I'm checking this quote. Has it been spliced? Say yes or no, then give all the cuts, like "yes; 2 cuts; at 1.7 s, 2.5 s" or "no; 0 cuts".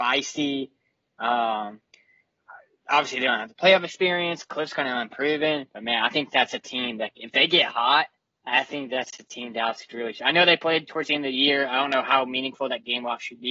no; 0 cuts